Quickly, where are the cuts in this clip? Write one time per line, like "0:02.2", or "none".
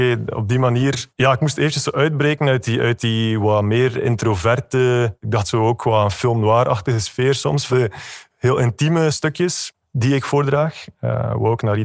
0:01.1
0:07.7